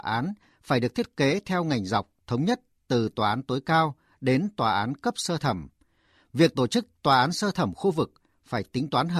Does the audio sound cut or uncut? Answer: uncut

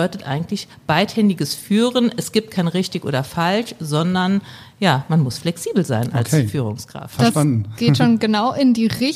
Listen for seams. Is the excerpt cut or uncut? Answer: uncut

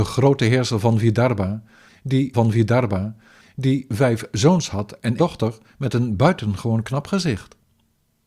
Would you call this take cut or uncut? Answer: cut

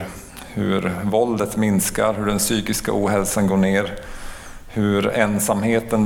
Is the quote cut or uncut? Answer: uncut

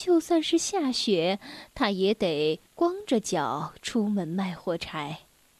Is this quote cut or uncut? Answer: cut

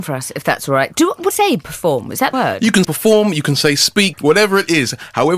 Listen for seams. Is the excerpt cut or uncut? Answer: cut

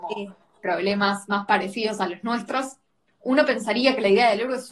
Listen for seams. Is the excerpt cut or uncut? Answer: uncut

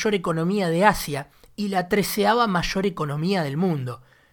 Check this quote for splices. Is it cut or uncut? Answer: uncut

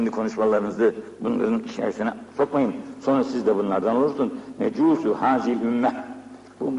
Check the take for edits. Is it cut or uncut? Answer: uncut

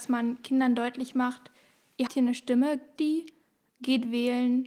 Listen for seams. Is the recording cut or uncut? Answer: cut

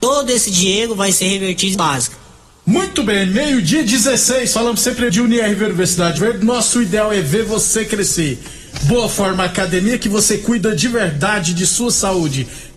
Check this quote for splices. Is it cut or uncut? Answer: cut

